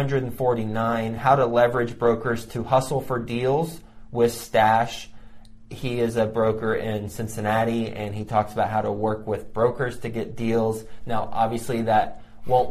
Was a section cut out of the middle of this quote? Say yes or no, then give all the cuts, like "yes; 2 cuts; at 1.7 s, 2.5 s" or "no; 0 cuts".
no; 0 cuts